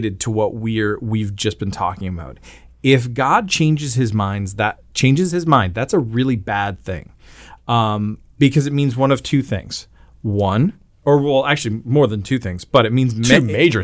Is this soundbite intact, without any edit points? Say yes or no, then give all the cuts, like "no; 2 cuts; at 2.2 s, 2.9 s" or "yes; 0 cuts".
yes; 0 cuts